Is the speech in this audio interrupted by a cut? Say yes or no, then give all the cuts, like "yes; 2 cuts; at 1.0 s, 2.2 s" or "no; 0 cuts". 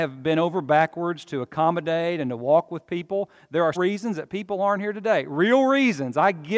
yes; 1 cut; at 3.8 s